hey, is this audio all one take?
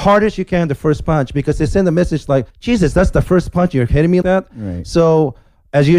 no; 2 cuts; at 2.5 s, 4.2 s

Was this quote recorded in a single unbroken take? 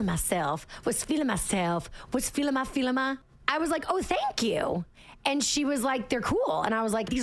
yes; 0 cuts

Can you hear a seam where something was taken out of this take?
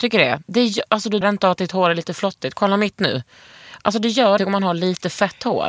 yes; 2 cuts; at 1.2 s, 4.4 s

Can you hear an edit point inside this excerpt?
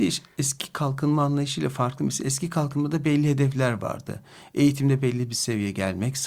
no; 0 cuts

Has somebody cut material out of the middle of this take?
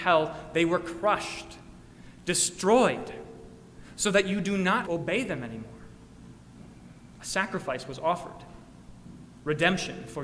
yes; 1 cut; at 4.9 s

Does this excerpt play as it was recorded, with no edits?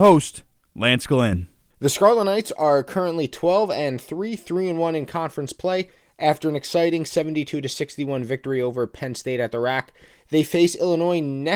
yes; 0 cuts

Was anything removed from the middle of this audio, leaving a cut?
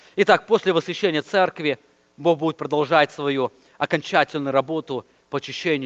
no; 0 cuts

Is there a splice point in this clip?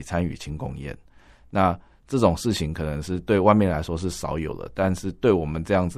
no; 0 cuts

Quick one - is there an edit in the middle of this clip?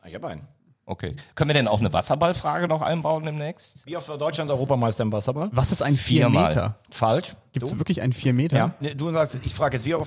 no; 0 cuts

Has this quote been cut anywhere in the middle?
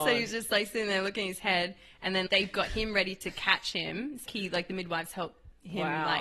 yes; 2 cuts; at 2.3 s, 4.3 s

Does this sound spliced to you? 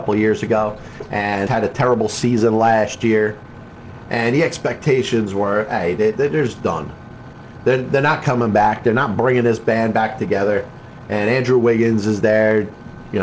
yes; 1 cut; at 1.5 s

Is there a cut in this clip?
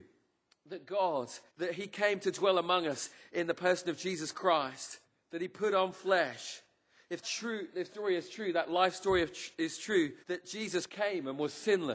yes; 6 cuts; at 1.5 s, 5.0 s, 7.2 s, 7.9 s, 10.2 s, 10.9 s

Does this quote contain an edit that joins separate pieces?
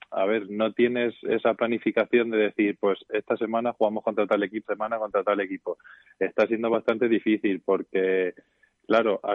yes; 1 cut; at 4.6 s

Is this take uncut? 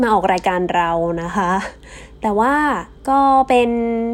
no; 1 cut; at 3.0 s

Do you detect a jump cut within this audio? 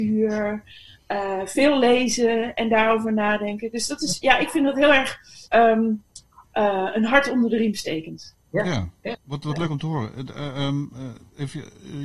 yes; 2 cuts; at 5.5 s, 9.2 s

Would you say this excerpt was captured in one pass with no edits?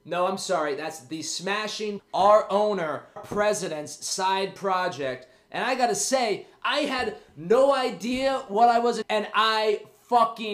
no; 3 cuts; at 2.0 s, 3.2 s, 9.0 s

